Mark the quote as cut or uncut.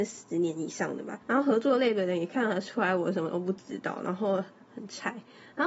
cut